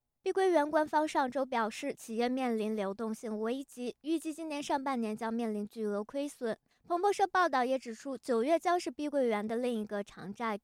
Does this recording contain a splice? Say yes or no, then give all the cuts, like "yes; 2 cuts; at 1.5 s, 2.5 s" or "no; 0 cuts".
no; 0 cuts